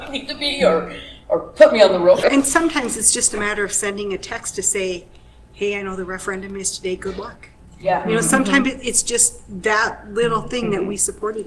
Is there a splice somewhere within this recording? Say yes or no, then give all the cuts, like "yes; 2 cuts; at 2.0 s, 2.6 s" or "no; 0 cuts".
no; 0 cuts